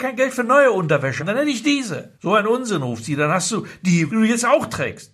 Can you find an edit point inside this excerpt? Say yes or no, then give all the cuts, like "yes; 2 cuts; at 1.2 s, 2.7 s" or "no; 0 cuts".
yes; 3 cuts; at 1.2 s, 2.1 s, 4.1 s